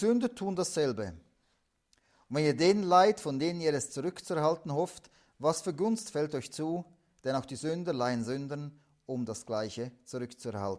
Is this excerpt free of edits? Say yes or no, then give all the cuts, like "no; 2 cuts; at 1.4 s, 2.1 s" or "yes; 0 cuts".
yes; 0 cuts